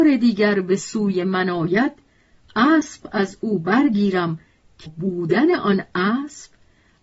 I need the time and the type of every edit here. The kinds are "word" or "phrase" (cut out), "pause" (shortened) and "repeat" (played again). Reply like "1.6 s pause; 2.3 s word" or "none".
4.9 s word